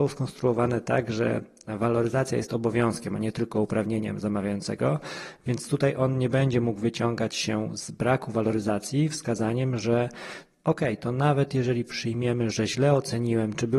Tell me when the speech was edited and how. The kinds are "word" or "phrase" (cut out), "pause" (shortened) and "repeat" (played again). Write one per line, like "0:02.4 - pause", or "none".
none